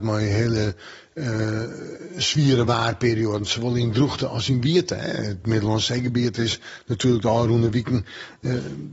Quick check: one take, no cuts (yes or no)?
yes